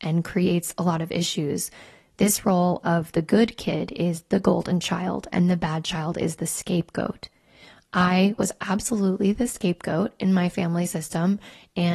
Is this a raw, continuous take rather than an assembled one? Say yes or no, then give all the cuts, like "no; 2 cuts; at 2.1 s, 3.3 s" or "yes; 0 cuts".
yes; 0 cuts